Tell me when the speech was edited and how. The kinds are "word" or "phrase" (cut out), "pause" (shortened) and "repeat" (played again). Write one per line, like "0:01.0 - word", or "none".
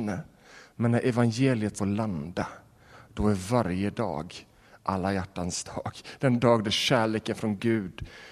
0:01.8 - phrase